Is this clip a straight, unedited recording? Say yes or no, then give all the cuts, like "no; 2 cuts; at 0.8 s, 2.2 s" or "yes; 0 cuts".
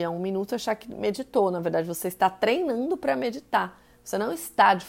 yes; 0 cuts